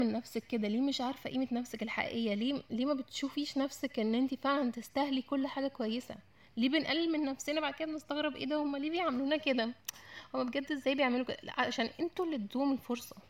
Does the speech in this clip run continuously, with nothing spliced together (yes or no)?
yes